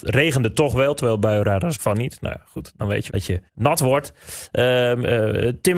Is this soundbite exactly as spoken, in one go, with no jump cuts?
no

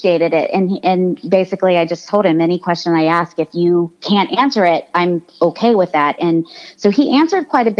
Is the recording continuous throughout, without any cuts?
yes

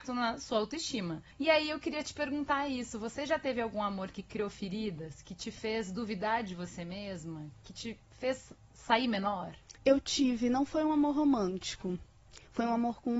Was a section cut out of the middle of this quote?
yes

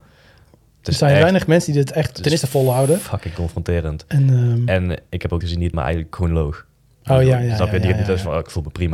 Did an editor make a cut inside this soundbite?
yes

